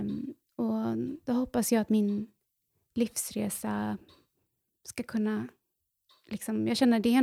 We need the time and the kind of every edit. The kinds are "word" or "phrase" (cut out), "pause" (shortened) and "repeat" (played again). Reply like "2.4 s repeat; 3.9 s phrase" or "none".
none